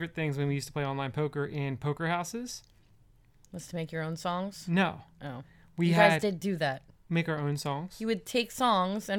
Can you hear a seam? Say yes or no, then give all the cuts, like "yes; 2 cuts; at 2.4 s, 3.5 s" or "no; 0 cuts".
no; 0 cuts